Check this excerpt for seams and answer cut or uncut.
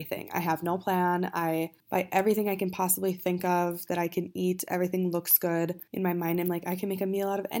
cut